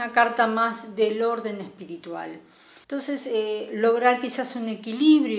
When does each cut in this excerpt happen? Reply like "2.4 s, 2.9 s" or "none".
2.8 s